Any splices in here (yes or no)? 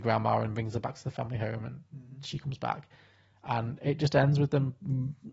no